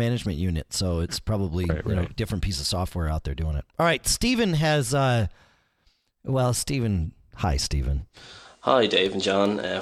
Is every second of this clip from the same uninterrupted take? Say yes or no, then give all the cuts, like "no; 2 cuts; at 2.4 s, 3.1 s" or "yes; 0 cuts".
yes; 0 cuts